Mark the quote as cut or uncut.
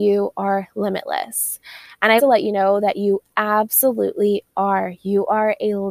cut